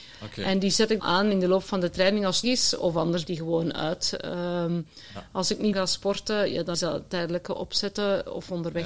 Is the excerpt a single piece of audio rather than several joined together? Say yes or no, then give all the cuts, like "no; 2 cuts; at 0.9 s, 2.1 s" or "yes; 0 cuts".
no; 5 cuts; at 1.0 s, 2.4 s, 3.3 s, 5.7 s, 6.7 s